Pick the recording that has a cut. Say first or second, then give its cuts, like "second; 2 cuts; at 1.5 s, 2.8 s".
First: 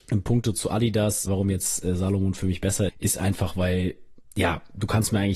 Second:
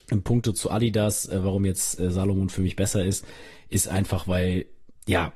first; 2 cuts; at 1.3 s, 2.9 s